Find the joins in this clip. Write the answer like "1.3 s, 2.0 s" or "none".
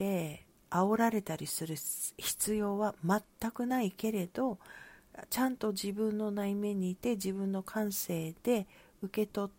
none